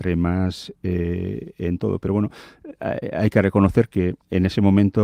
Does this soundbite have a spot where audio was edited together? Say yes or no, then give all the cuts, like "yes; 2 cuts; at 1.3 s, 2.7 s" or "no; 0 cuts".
no; 0 cuts